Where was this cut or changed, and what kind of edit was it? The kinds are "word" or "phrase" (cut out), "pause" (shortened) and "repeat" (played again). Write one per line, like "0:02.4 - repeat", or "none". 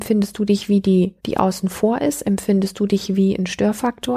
0:01.2 - pause

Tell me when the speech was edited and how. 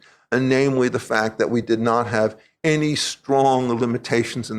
none

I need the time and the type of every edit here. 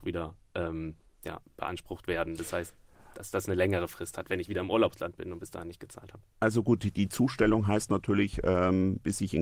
none

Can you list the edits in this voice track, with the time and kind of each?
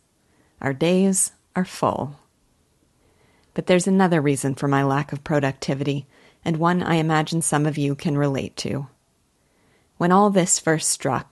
none

